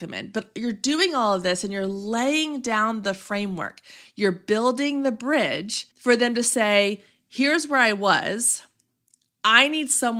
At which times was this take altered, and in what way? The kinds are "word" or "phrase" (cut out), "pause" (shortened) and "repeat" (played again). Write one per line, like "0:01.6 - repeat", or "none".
0:05.9 - pause

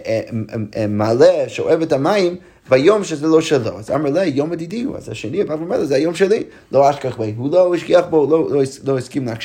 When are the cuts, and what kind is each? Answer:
none

